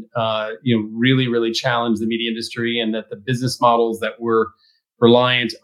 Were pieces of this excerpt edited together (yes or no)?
no